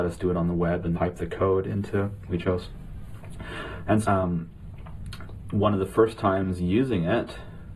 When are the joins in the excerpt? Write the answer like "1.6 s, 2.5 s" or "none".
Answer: 0.9 s, 2.3 s, 4.0 s